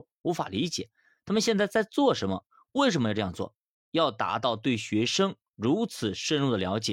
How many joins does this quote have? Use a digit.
0